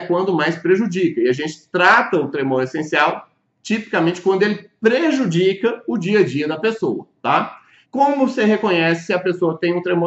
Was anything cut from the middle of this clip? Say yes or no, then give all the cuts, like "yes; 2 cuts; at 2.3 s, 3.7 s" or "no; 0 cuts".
no; 0 cuts